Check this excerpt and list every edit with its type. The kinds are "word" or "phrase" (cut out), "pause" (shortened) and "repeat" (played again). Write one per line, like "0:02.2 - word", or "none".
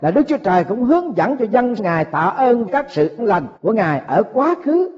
0:01.8 - phrase
0:02.7 - word
0:03.2 - word
0:03.6 - pause